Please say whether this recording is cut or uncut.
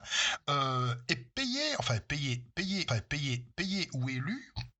cut